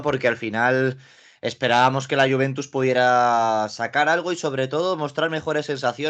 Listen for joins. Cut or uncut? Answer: uncut